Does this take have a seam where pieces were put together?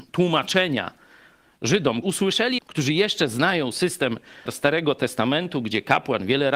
yes; 3 cuts; at 2.0 s, 2.6 s, 4.5 s

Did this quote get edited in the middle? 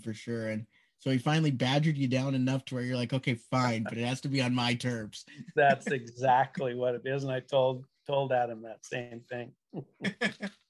no; 0 cuts

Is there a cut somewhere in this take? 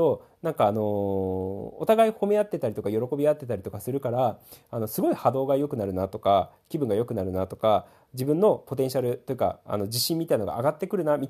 no; 0 cuts

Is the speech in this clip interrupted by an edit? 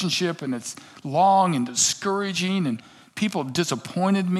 no; 0 cuts

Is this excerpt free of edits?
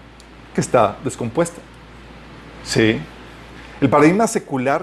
yes; 0 cuts

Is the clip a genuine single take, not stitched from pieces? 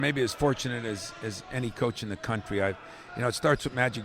yes; 0 cuts

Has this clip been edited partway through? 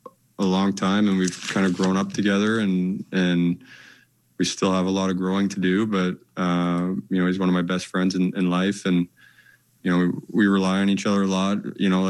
yes; 1 cut; at 9.8 s

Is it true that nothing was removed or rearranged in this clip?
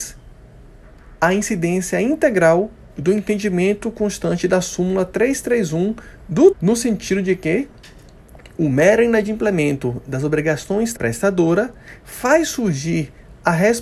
no; 2 cuts; at 6.5 s, 11.0 s

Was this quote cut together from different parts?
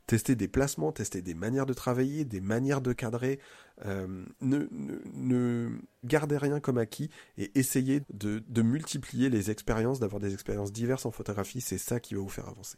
yes; 3 cuts; at 6.0 s, 8.0 s, 8.4 s

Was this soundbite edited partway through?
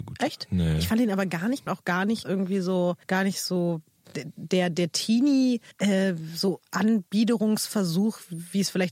yes; 5 cuts; at 1.7 s, 2.2 s, 3.0 s, 4.1 s, 5.7 s

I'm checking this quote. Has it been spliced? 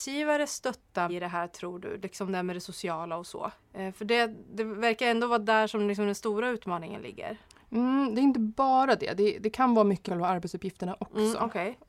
yes; 4 cuts; at 1.1 s, 3.6 s, 7.4 s, 10.1 s

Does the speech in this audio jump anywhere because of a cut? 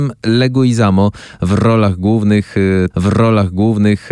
yes; 1 cut; at 2.9 s

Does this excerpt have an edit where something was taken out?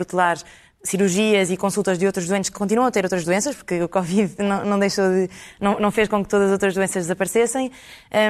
no; 0 cuts

